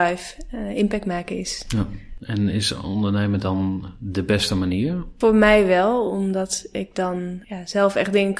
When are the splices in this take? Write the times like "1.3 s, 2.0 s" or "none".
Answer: none